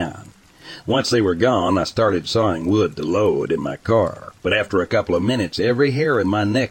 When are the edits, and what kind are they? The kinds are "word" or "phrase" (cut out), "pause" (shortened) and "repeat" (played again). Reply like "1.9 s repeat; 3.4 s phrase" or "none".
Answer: 4.4 s pause